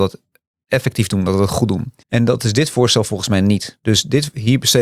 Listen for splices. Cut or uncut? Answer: cut